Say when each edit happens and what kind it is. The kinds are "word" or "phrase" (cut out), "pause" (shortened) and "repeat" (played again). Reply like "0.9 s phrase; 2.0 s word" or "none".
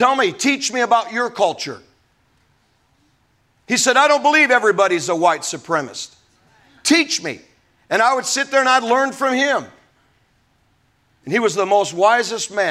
none